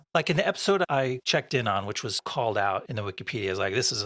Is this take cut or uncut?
uncut